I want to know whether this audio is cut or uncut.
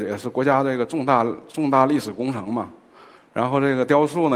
uncut